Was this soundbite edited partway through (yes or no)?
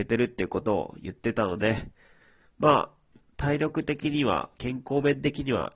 no